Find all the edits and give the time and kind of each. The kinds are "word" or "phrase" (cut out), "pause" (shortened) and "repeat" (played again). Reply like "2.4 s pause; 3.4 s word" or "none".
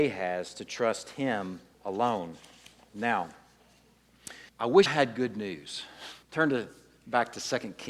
1.7 s pause; 4.5 s pause; 4.9 s word; 6.2 s pause